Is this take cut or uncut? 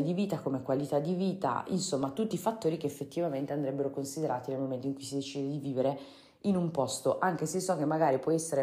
uncut